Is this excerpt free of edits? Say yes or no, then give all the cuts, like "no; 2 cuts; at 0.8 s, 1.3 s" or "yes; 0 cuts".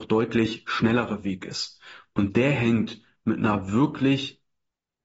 yes; 0 cuts